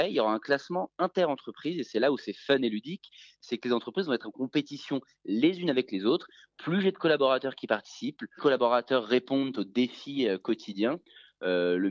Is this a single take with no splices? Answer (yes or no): no